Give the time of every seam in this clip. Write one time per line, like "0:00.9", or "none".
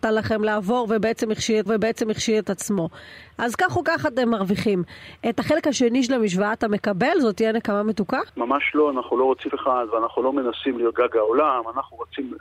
0:01.7
0:08.3
0:09.5
0:10.9